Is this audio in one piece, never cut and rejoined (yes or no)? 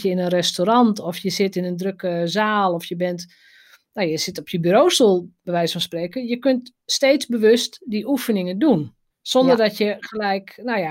no